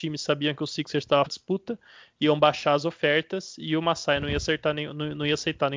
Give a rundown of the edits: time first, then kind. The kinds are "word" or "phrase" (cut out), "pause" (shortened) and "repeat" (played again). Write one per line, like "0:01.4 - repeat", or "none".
0:01.3 - phrase